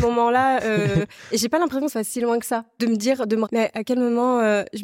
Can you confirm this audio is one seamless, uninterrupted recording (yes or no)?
no